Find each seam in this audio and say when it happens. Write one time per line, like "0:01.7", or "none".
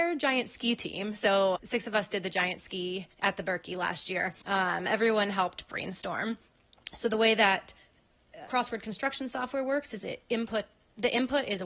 0:01.5
0:03.1
0:04.4
0:08.5